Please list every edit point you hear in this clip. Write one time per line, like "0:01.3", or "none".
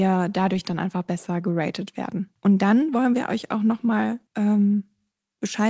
0:04.3